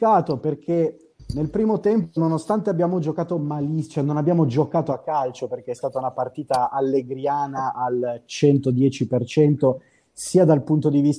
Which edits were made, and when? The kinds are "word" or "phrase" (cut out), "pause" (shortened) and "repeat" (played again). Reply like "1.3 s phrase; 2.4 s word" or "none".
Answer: 1.2 s pause